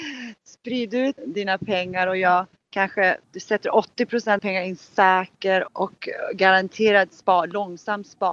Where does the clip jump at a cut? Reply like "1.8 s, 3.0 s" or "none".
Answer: 1.2 s, 3.2 s, 4.4 s, 5.7 s